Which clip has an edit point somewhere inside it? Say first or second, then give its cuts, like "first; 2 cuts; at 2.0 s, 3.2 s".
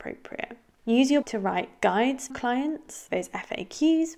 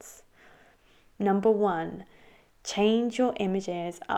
first; 3 cuts; at 1.2 s, 2.3 s, 3.1 s